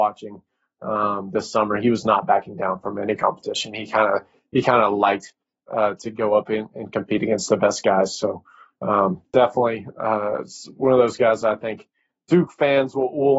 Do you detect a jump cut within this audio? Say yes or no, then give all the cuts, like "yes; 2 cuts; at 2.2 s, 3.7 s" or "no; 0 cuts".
no; 0 cuts